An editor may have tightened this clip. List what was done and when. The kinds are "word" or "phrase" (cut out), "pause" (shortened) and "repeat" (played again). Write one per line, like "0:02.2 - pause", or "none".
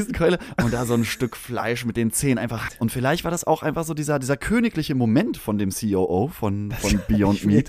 0:02.7 - word